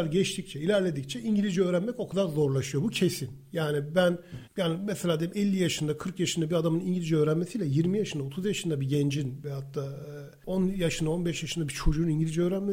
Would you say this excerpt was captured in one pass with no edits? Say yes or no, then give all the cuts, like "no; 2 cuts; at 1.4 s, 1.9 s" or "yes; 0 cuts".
no; 1 cut; at 4.5 s